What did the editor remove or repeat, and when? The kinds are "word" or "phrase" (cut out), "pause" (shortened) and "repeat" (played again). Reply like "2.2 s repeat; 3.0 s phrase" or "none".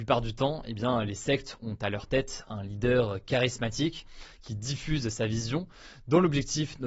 none